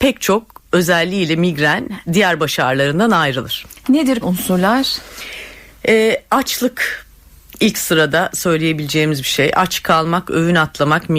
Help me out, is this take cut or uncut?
cut